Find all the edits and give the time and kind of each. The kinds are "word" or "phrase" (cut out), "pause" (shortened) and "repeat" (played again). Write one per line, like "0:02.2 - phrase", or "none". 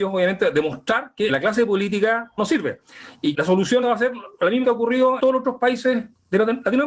0:01.3 - word
0:02.4 - word
0:03.3 - word
0:03.8 - word
0:04.6 - word
0:05.2 - word